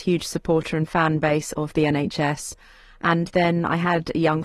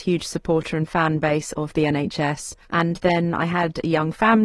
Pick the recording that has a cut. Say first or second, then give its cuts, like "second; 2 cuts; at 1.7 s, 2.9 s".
second; 1 cut; at 2.6 s